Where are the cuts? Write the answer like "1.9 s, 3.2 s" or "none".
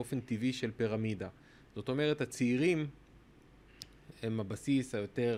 none